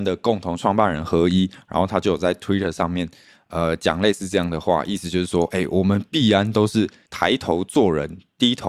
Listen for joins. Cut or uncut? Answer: uncut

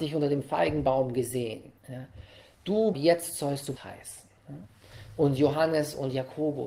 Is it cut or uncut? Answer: cut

